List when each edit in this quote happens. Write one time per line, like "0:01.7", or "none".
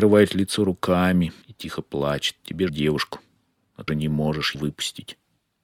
0:01.4
0:02.7
0:03.9
0:04.5